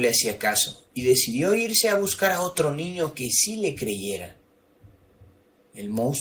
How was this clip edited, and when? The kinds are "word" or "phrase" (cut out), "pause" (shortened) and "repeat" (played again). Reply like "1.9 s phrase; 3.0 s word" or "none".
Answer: none